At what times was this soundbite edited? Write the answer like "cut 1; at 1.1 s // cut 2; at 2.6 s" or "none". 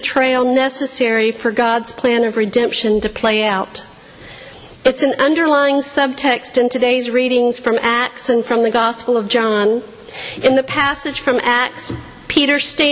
none